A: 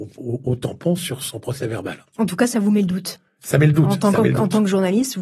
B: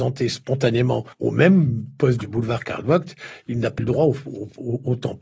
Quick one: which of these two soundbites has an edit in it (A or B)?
B